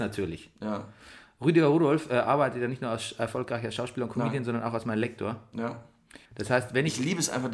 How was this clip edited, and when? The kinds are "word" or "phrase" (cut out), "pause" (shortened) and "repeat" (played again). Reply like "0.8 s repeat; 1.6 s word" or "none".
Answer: 6.3 s pause